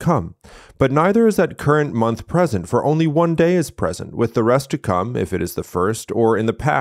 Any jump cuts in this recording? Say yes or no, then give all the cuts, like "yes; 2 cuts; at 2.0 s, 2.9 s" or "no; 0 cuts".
no; 0 cuts